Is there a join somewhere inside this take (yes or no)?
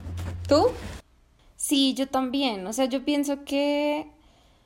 no